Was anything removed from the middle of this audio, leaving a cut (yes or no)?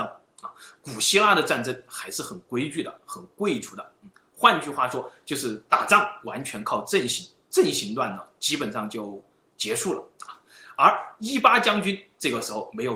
no